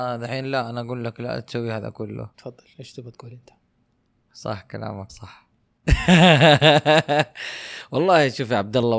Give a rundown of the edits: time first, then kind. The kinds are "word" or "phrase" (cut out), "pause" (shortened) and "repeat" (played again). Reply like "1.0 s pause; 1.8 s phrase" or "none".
2.3 s word; 5.1 s word